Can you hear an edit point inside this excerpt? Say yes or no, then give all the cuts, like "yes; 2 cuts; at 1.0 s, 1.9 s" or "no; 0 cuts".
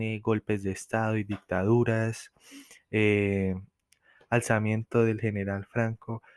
no; 0 cuts